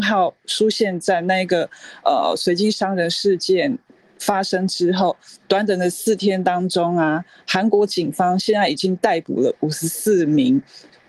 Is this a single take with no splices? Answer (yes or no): yes